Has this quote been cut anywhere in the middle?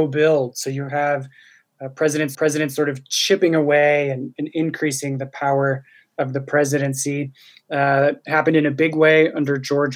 yes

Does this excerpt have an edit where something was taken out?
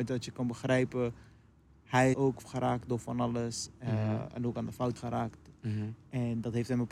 yes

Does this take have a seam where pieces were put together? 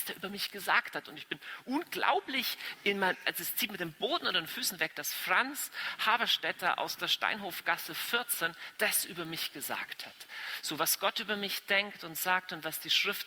no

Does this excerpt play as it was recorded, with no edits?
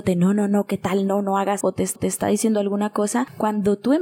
no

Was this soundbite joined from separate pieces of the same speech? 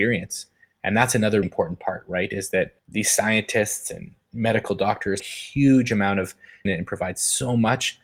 yes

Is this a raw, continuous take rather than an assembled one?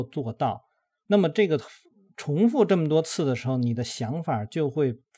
yes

